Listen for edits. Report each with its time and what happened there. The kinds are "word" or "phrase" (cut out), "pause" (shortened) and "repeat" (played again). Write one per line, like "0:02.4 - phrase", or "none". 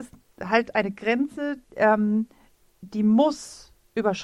0:01.6 - pause